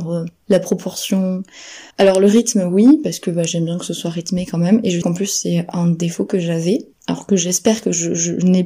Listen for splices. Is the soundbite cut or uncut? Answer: cut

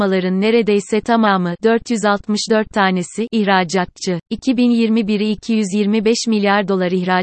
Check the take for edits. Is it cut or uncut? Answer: cut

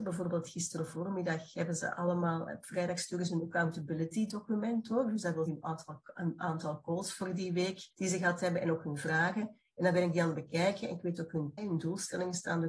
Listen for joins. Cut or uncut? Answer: cut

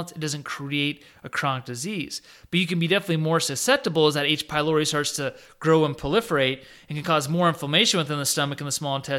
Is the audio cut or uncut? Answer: uncut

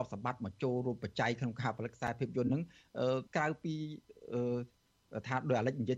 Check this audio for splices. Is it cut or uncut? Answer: cut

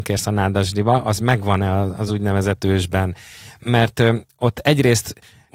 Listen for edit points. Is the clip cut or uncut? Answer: uncut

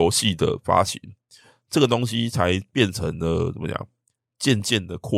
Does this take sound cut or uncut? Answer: uncut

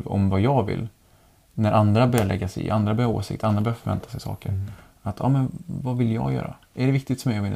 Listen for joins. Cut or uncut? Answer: uncut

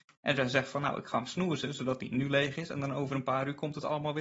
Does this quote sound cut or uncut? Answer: uncut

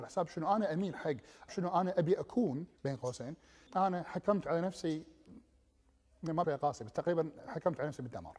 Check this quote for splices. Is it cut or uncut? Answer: cut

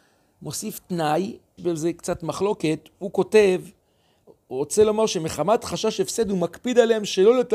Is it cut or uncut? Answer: cut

